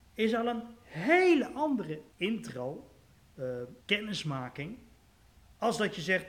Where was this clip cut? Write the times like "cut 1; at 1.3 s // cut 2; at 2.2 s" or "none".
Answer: cut 1; at 2.1 s // cut 2; at 3.8 s